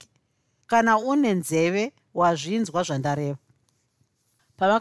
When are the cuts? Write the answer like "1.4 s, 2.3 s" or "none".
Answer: none